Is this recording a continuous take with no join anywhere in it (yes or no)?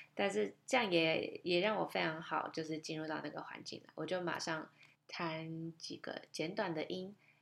yes